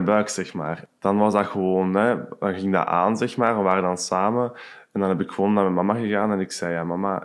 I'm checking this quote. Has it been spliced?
no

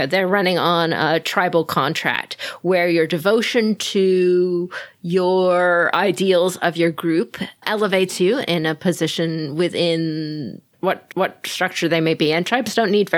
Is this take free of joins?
no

